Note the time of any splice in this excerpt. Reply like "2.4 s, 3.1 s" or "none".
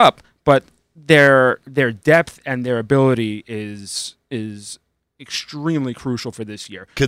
none